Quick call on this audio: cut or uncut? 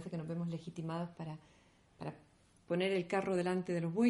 uncut